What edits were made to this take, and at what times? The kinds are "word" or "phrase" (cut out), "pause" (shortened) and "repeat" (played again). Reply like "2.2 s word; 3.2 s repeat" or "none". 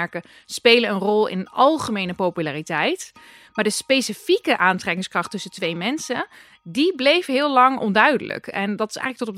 none

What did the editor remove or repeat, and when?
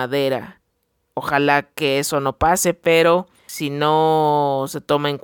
none

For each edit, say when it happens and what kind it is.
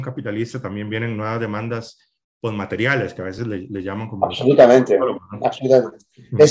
none

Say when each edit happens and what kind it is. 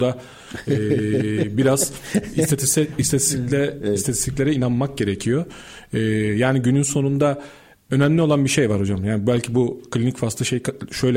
none

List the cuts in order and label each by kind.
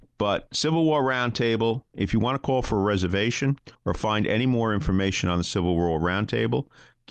3.7 s pause

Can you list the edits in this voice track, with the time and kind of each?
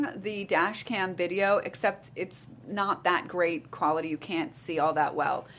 none

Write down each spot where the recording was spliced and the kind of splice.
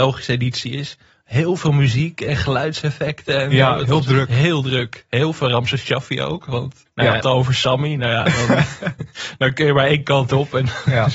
6.9 s pause; 7.2 s phrase

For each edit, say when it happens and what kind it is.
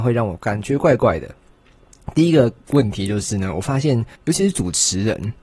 4.2 s pause

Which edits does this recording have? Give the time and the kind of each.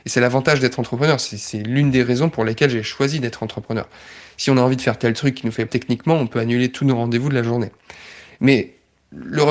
5.7 s word

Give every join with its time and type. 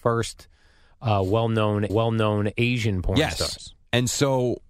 1.9 s repeat

